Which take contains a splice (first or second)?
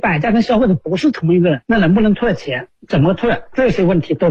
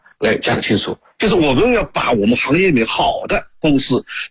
first